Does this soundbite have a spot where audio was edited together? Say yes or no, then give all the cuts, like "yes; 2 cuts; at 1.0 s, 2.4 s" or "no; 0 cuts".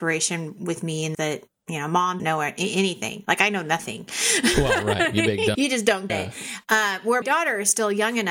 yes; 5 cuts; at 1.1 s, 2.2 s, 5.5 s, 6.1 s, 7.2 s